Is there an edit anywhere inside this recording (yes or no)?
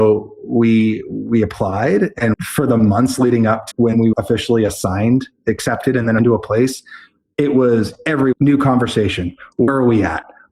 yes